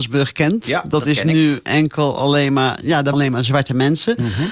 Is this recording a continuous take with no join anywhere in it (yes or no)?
no